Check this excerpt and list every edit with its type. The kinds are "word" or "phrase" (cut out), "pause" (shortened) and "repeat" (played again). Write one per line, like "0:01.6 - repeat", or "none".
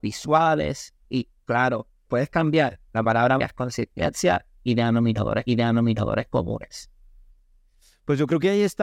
0:01.0 - pause
0:02.1 - word
0:02.9 - pause
0:03.4 - word
0:05.5 - repeat